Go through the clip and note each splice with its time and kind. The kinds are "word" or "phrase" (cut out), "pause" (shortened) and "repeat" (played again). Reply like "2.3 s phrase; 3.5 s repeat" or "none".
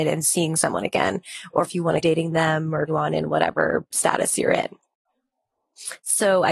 2.0 s word; 2.9 s word; 3.9 s word

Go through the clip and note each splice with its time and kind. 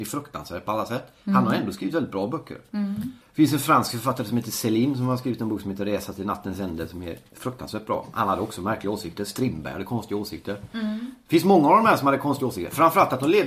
3.2 s pause; 7.3 s pause

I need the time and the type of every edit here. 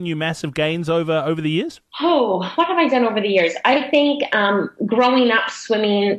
1.9 s pause

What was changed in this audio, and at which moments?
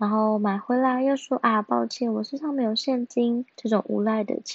3.5 s pause

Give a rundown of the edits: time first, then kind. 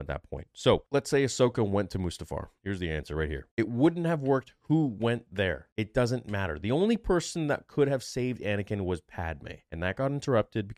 none

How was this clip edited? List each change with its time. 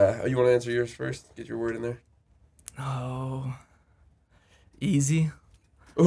none

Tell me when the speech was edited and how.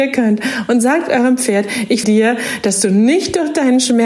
2.0 s word

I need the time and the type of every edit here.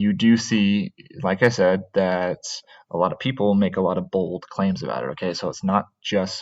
none

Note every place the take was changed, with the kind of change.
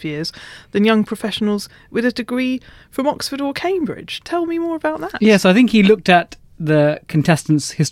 none

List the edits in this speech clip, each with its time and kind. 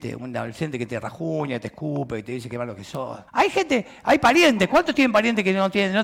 3.3 s pause

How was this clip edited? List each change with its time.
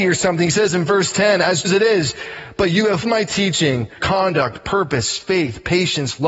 1.6 s word; 3.0 s word; 4.0 s word

